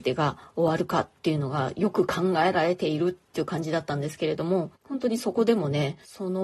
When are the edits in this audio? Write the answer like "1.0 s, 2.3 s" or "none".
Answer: 4.8 s